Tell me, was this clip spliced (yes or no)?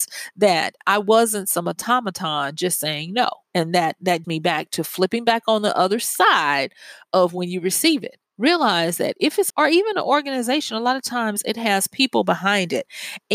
yes